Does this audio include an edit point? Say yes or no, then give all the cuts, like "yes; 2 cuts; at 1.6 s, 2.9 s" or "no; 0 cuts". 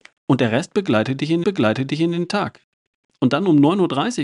yes; 1 cut; at 1.4 s